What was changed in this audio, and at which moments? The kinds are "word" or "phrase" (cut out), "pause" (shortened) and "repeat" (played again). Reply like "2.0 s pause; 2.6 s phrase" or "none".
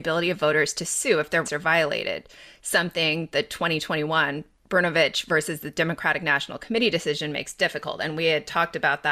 1.4 s word